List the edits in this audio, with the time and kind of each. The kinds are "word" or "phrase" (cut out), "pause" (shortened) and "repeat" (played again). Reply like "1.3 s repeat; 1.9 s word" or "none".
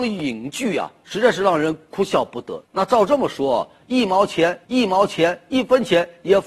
2.6 s pause; 4.6 s repeat